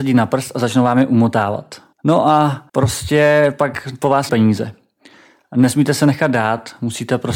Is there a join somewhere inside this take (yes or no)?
yes